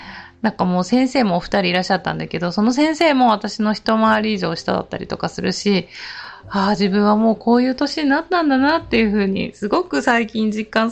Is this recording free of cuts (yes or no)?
yes